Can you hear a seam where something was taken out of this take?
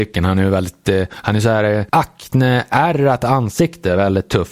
no; 0 cuts

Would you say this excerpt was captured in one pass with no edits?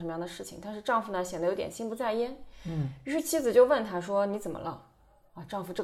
yes; 0 cuts

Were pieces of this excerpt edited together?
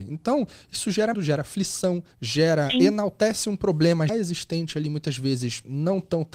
yes; 3 cuts; at 1.1 s, 2.1 s, 4.1 s

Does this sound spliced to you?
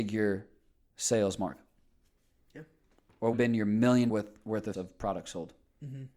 yes; 3 cuts; at 3.3 s, 4.1 s, 4.7 s

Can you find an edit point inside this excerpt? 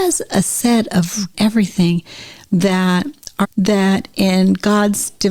yes; 2 cuts; at 1.3 s, 3.4 s

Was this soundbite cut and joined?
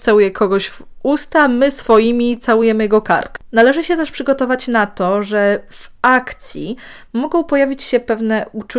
no; 0 cuts

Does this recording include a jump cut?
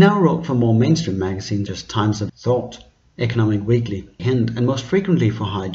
yes; 3 cuts; at 1.7 s, 2.3 s, 4.2 s

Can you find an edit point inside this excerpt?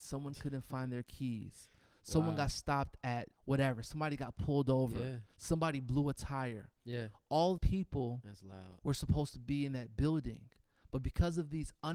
yes; 2 cuts; at 3.3 s, 7.6 s

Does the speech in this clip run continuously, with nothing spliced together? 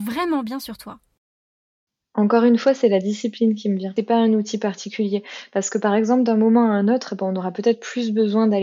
yes; 0 cuts

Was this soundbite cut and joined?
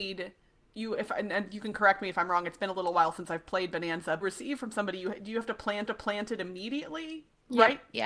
yes; 2 cuts; at 4.2 s, 5.9 s

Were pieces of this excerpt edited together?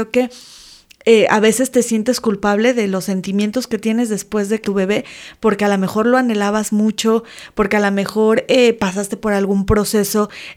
yes; 1 cut; at 4.6 s

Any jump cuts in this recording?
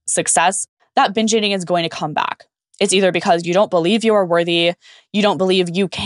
no; 0 cuts

